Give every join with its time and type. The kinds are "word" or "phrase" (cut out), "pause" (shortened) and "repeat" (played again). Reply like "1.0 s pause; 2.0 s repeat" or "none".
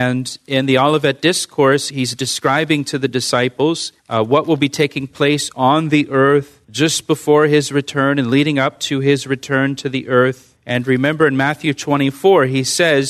4.0 s pause; 6.6 s pause; 10.6 s pause